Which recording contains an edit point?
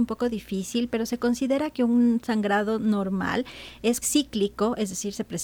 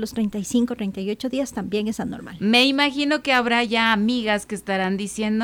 first; 1 cut; at 4.0 s

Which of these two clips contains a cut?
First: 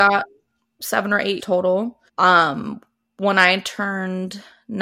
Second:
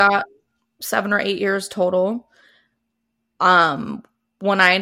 first; 2 cuts; at 1.4 s, 2.1 s

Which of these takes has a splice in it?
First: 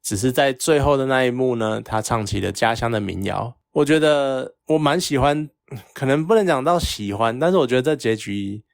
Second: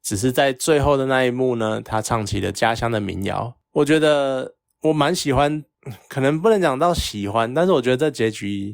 first; 1 cut; at 4.6 s

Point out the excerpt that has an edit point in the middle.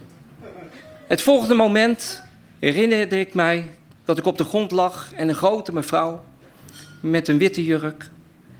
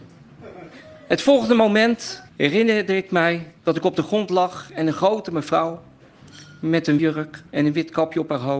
second; 4 cuts; at 2.3 s, 3.6 s, 7.0 s, 7.5 s

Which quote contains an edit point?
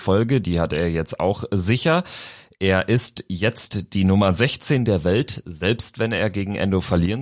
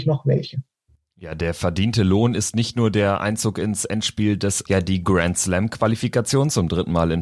second; 1 cut; at 4.7 s

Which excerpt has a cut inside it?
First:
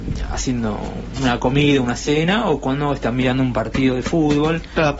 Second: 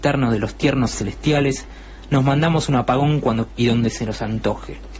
second; 2 cuts; at 0.9 s, 3.5 s

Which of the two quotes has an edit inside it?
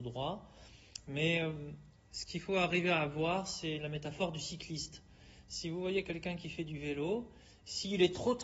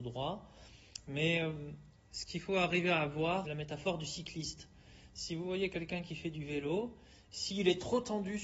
second; 1 cut; at 3.4 s

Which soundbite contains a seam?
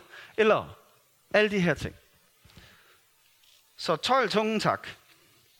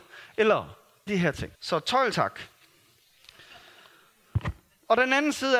second; 3 cuts; at 1.1 s, 1.5 s, 2.1 s

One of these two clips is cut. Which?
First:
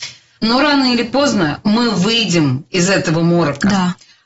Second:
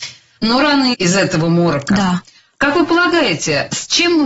second; 1 cut; at 0.9 s

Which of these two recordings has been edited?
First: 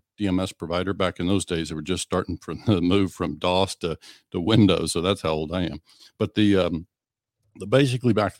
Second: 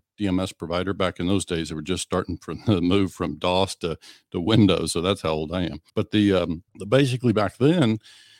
second; 2 cuts; at 5.9 s, 6.7 s

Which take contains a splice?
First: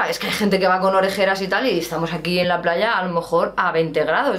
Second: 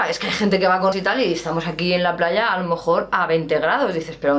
second; 1 cut; at 0.9 s

